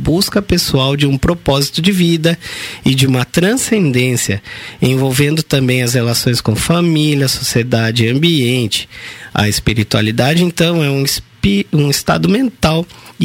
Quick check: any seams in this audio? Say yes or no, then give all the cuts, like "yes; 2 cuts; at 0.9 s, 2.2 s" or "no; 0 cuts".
no; 0 cuts